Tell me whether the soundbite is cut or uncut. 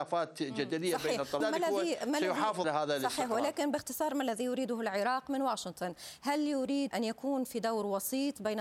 cut